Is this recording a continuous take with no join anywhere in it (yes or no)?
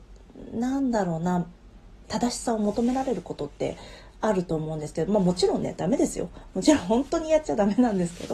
no